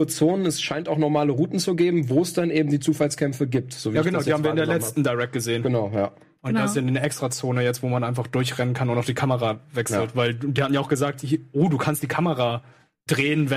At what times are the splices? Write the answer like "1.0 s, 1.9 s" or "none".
none